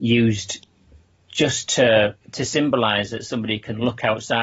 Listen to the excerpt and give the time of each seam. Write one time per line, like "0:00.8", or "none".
0:02.2